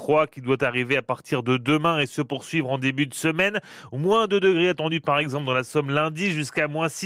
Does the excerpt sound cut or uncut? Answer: uncut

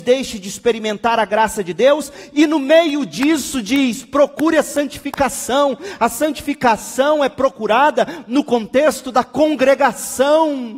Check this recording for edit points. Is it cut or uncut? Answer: uncut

